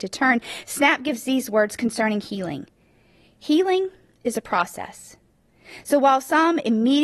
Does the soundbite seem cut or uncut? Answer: uncut